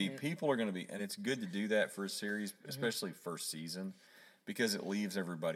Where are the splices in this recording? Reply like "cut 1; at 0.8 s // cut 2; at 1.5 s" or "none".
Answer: cut 1; at 1.0 s

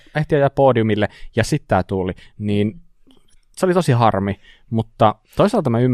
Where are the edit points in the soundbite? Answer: none

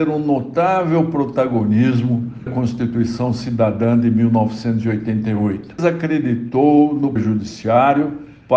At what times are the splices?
cut 1; at 2.5 s // cut 2; at 5.8 s // cut 3; at 7.2 s

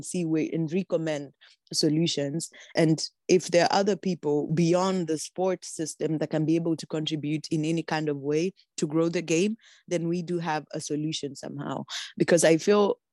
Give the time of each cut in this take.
none

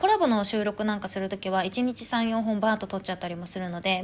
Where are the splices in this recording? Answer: none

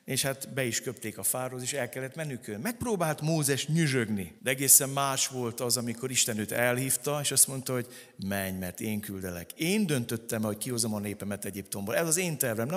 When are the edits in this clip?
cut 1; at 4.4 s

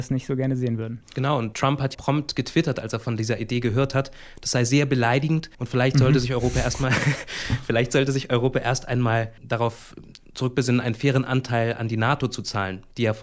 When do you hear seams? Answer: cut 1; at 1.5 s // cut 2; at 1.9 s // cut 3; at 5.5 s // cut 4; at 9.4 s

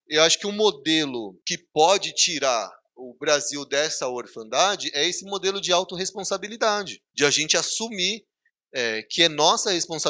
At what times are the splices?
cut 1; at 1.4 s // cut 2; at 7.1 s

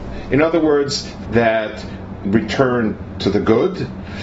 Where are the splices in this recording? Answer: cut 1; at 1.2 s // cut 2; at 2.2 s

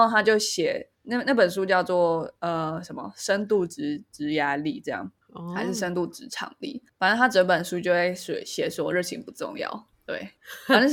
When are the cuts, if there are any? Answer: none

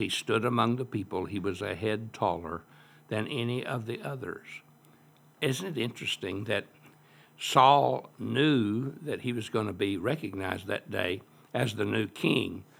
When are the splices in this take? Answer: none

